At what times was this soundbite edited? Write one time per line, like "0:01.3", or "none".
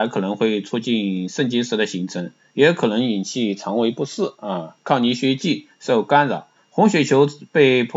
0:06.6